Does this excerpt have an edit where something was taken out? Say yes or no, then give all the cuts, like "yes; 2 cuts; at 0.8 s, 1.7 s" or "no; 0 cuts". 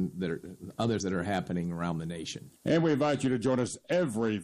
yes; 2 cuts; at 1.0 s, 2.6 s